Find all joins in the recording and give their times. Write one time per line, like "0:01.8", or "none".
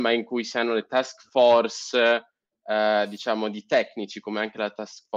none